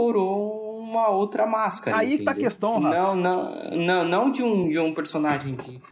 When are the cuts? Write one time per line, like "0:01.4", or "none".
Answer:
none